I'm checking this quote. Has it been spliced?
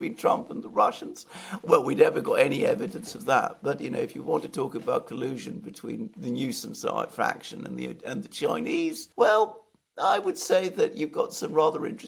yes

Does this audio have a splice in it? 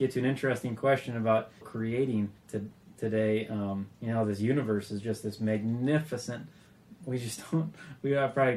yes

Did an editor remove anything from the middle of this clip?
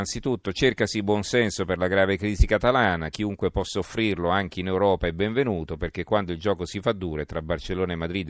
no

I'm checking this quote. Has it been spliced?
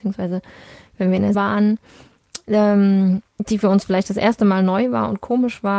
yes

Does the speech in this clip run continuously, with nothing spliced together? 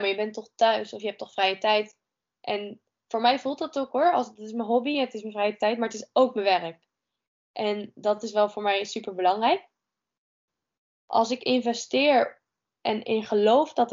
yes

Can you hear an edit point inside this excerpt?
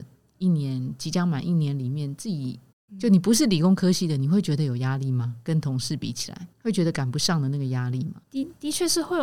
yes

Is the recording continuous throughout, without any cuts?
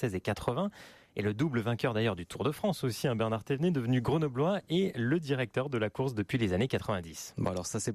yes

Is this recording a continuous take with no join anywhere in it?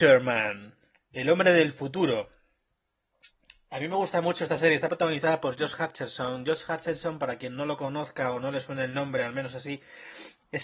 yes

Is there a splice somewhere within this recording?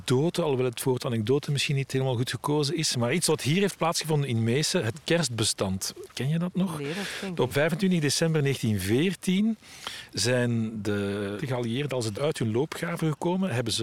yes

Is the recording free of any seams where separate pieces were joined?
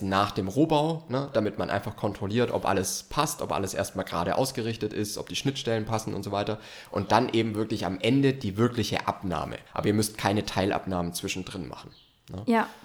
no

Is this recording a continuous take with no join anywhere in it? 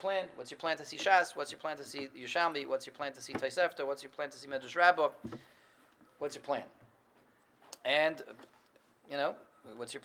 yes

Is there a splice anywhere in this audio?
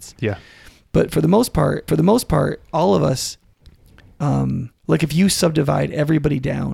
yes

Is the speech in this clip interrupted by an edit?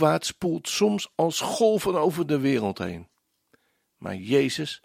no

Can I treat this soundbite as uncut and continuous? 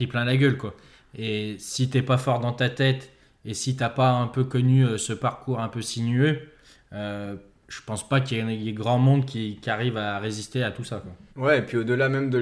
no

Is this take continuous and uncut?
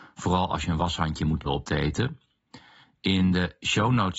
no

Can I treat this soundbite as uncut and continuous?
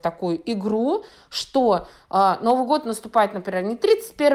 yes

